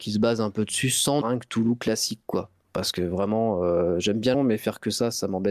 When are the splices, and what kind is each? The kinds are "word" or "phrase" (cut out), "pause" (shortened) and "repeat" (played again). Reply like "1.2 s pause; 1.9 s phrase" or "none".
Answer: 1.2 s phrase; 4.3 s word